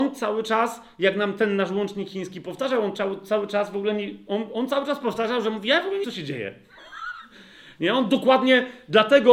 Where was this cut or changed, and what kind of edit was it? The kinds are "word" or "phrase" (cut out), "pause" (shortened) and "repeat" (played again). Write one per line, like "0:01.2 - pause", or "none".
0:06.0 - phrase

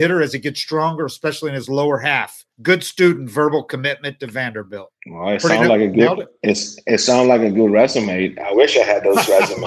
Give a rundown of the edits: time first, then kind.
0:02.5 - pause
0:05.0 - pause

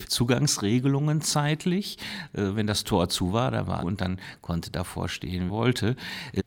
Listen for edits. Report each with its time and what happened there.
0:03.8 - phrase
0:05.5 - word

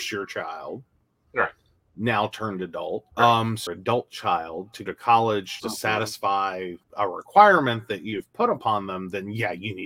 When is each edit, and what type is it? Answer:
0:03.1 - pause
0:03.7 - word
0:04.9 - word
0:05.6 - word
0:06.8 - pause

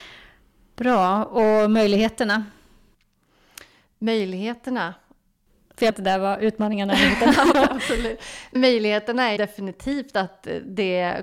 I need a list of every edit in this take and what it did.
0:05.9 - word
0:07.5 - word
0:08.5 - word
0:09.4 - word

